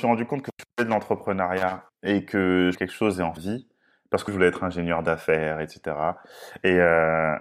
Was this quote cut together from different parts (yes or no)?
yes